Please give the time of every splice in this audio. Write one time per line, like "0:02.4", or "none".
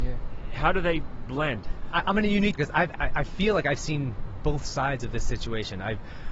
0:02.6
0:02.9